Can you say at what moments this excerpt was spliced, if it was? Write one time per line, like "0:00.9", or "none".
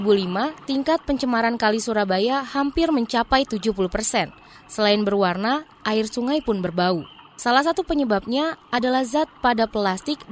none